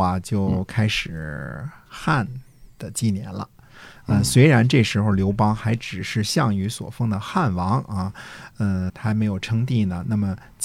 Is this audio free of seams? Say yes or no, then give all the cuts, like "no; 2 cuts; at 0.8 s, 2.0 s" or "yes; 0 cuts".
no; 1 cut; at 8.9 s